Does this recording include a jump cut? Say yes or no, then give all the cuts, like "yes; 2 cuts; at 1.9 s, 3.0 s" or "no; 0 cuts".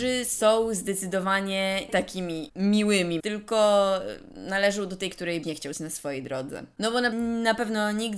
yes; 6 cuts; at 1.9 s, 3.2 s, 5.1 s, 5.4 s, 5.7 s, 7.1 s